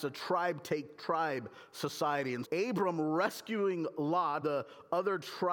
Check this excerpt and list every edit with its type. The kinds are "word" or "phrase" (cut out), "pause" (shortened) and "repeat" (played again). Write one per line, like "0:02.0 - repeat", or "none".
0:02.4 - word
0:04.4 - word

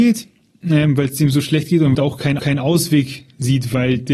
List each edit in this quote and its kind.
0:01.9 - phrase
0:02.4 - repeat

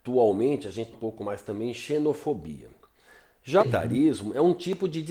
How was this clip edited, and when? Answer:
0:00.9 - phrase
0:03.6 - word

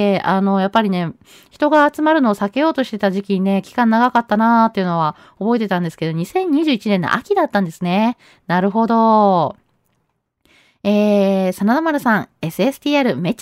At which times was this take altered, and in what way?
none

